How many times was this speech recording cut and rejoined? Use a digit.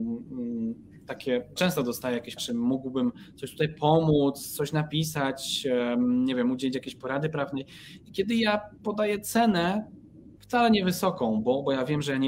3